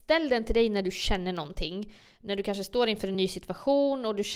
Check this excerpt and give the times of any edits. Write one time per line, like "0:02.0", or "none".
none